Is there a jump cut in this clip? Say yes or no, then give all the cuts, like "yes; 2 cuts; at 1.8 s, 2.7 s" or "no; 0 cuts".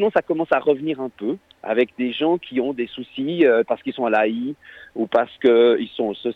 no; 0 cuts